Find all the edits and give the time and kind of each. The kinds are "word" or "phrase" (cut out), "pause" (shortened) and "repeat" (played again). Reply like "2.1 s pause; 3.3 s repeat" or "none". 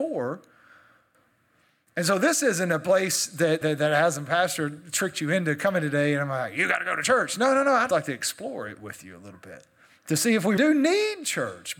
3.6 s word; 7.9 s word; 9.8 s pause; 10.6 s word